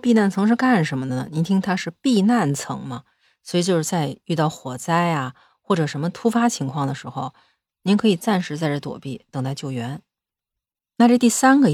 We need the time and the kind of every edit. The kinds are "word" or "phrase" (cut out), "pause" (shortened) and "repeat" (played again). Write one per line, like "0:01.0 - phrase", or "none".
none